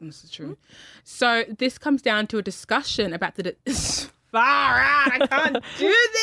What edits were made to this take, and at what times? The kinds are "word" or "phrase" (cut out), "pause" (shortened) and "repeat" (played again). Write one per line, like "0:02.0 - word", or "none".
none